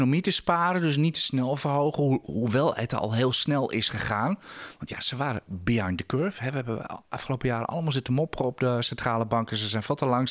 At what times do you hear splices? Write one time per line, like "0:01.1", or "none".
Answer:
none

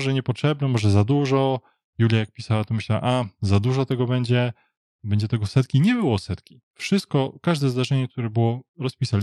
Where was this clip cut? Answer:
0:06.6

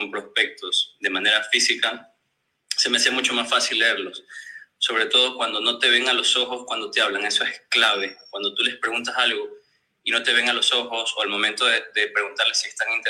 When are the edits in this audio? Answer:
none

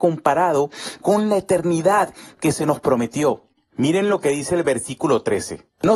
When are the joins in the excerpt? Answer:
none

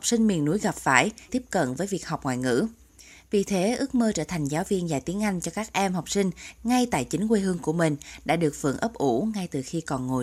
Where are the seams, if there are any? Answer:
0:01.3

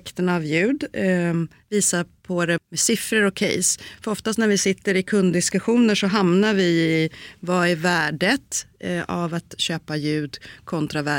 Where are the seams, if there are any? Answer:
0:02.6

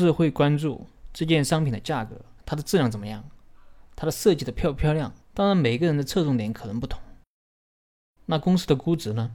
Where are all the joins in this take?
0:02.4
0:05.2

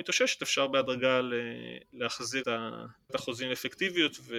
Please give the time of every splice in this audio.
0:02.4
0:03.1

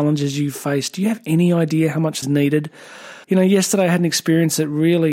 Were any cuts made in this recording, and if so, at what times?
0:02.2
0:03.2

